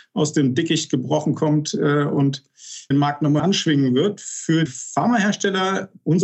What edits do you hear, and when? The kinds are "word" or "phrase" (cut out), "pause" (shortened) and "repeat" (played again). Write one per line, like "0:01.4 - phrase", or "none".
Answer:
0:02.9 - word
0:03.4 - word
0:04.7 - word